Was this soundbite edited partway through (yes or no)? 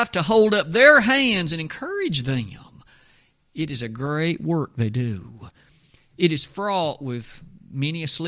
no